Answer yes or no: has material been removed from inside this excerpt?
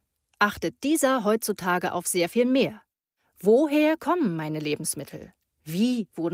no